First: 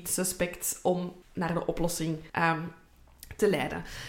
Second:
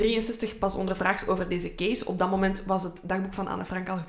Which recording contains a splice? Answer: first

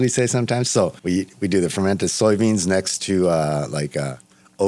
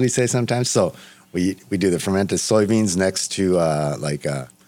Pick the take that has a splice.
first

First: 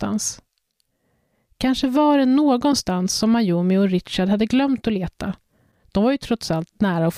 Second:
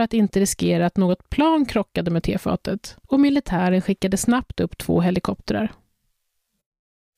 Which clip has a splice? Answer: second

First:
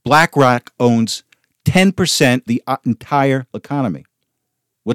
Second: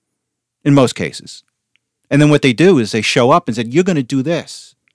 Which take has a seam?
first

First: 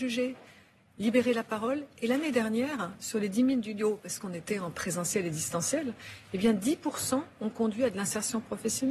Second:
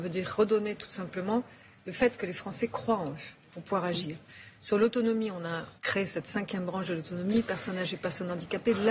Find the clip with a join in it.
second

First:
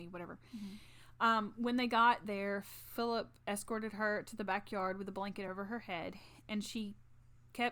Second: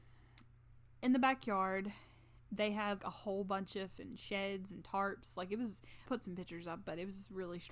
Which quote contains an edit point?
second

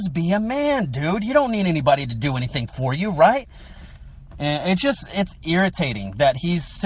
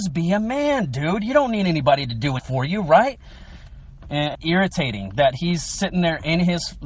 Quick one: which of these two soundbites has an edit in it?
second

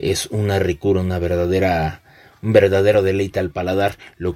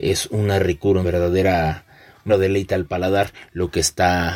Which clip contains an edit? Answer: second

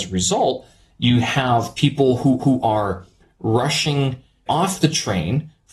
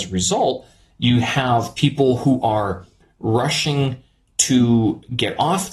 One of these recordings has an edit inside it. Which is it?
first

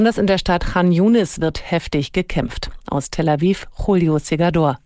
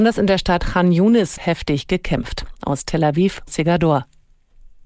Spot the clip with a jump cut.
second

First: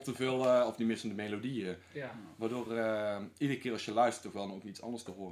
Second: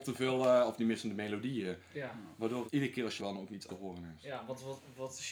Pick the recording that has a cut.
second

